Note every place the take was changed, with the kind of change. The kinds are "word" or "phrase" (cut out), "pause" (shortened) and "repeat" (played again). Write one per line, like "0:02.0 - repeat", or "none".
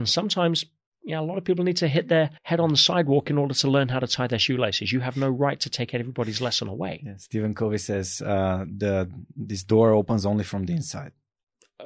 0:02.4 - pause